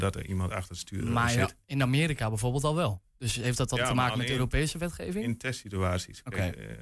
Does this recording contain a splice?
no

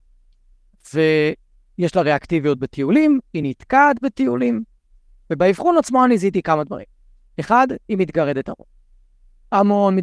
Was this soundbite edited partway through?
no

